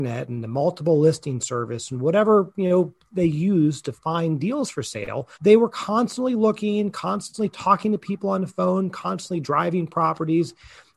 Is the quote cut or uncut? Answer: cut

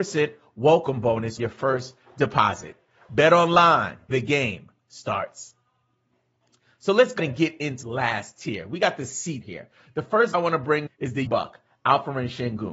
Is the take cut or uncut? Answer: cut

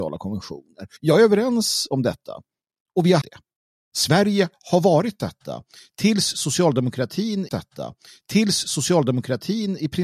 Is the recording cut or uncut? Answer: cut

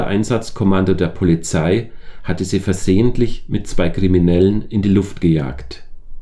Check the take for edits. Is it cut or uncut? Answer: uncut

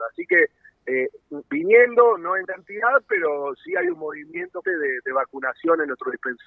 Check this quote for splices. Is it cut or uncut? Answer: cut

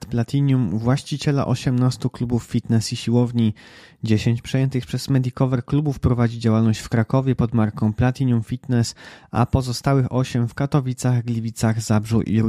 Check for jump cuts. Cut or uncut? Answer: uncut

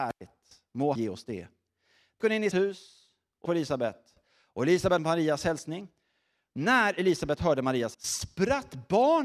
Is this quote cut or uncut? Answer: cut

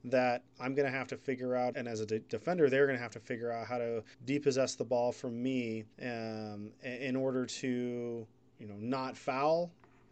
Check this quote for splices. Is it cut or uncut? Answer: cut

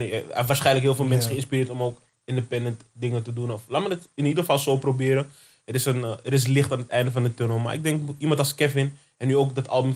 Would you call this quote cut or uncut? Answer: uncut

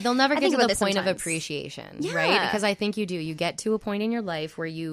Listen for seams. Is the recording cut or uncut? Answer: uncut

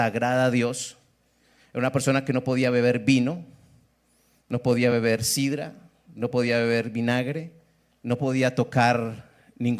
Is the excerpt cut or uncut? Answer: uncut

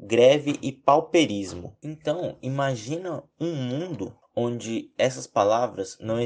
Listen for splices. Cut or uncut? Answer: uncut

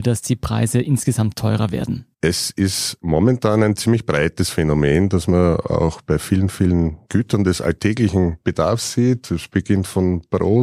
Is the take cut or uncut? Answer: cut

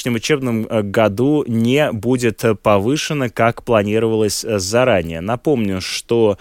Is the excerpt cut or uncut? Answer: uncut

